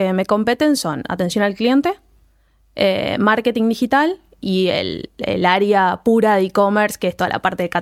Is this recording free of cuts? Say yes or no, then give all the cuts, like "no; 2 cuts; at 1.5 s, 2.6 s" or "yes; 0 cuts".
yes; 0 cuts